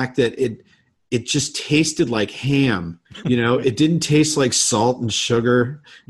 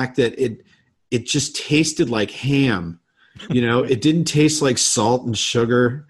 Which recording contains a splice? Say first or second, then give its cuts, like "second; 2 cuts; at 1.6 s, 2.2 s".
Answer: first; 1 cut; at 3.1 s